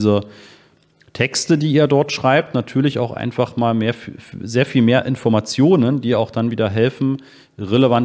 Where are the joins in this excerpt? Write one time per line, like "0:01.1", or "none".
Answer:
none